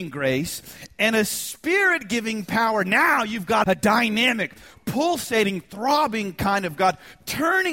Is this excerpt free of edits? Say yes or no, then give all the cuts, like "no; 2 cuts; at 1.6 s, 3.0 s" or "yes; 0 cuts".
no; 1 cut; at 3.6 s